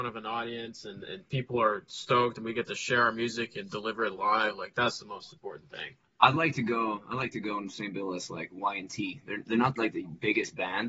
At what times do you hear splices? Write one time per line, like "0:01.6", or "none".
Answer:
none